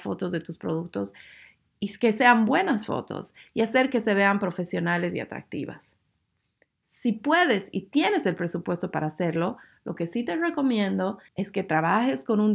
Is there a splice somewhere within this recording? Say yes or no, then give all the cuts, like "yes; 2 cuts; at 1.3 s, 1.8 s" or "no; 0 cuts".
yes; 1 cut; at 11.3 s